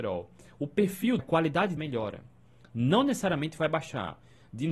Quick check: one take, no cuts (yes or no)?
no